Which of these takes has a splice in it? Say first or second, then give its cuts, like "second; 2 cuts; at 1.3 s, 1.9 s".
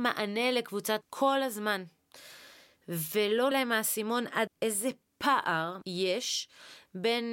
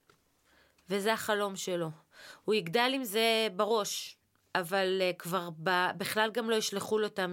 first; 4 cuts; at 1.0 s, 3.5 s, 4.5 s, 5.8 s